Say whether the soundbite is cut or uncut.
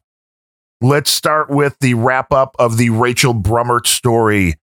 uncut